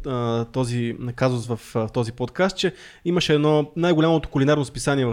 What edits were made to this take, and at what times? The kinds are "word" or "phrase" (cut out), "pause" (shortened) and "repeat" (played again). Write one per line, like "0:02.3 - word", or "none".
none